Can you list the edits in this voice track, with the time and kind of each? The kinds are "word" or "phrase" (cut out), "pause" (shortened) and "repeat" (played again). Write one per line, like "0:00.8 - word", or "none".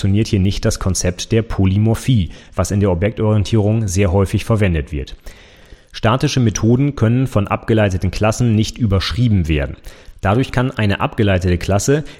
none